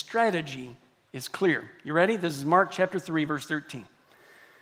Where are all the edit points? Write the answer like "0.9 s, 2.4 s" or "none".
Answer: none